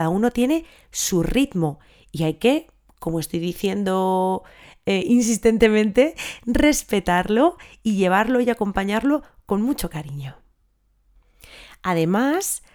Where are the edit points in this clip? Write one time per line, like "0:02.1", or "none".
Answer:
none